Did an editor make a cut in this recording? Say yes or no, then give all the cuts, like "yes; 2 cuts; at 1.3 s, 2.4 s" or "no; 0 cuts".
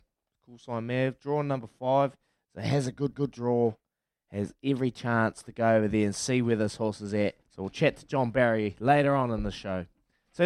yes; 2 cuts; at 3.1 s, 7.4 s